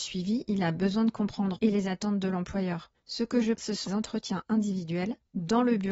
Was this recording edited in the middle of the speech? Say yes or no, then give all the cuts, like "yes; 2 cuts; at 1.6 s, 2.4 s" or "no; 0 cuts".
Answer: yes; 3 cuts; at 1.6 s, 3.5 s, 3.9 s